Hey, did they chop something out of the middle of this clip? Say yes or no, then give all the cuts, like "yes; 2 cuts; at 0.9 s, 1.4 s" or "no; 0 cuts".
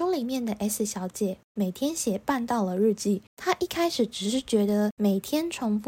yes; 2 cuts; at 1.5 s, 3.3 s